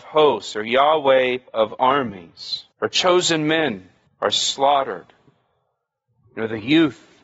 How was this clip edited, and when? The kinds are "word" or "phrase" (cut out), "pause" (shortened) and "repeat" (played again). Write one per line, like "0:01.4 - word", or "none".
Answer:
0:01.5 - pause
0:02.7 - pause
0:04.1 - pause